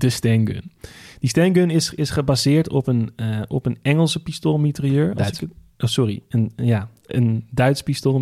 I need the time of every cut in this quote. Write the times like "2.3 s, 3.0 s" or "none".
none